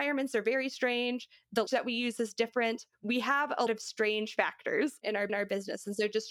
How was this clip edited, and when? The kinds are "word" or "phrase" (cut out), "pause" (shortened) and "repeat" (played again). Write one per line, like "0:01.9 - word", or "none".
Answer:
0:01.7 - word
0:03.7 - word
0:05.3 - repeat